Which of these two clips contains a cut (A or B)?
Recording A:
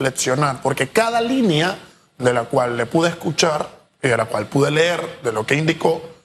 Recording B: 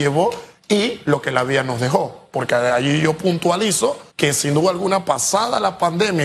B